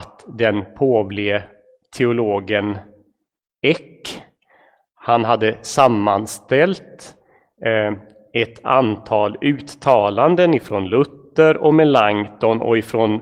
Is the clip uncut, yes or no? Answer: yes